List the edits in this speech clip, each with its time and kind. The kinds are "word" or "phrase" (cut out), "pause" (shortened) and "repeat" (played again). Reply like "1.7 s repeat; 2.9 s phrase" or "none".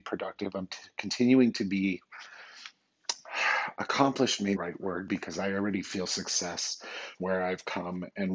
4.6 s phrase; 7.2 s word